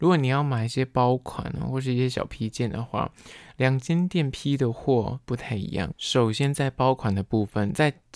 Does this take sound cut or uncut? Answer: cut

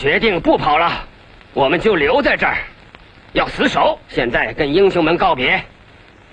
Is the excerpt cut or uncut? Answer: cut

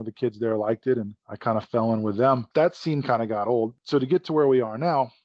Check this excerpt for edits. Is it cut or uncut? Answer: cut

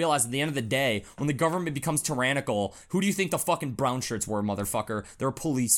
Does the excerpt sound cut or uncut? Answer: uncut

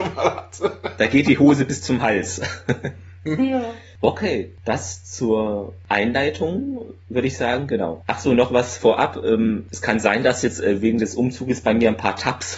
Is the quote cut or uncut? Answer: uncut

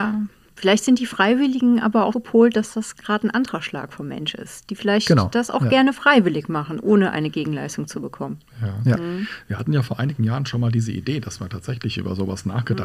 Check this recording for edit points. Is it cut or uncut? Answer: cut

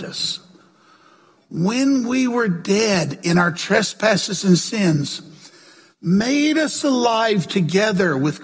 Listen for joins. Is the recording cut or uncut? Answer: uncut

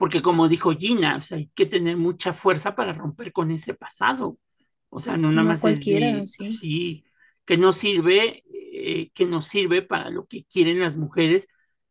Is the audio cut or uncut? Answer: uncut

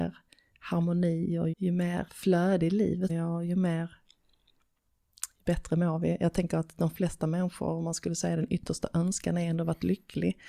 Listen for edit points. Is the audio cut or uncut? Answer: cut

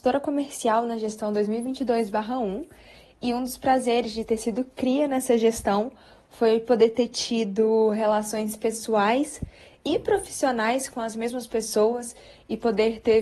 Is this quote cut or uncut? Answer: uncut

